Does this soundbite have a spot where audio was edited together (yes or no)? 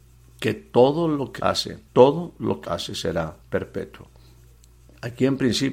yes